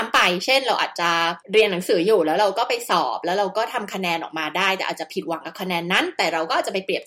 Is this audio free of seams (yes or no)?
no